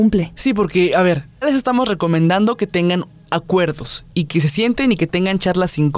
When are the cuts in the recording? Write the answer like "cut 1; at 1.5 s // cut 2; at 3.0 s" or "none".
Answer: cut 1; at 1.4 s